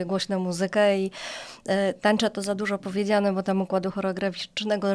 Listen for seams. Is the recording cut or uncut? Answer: uncut